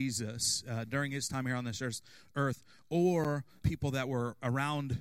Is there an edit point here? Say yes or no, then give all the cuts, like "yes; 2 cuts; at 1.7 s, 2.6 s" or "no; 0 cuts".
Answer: yes; 1 cut; at 3.6 s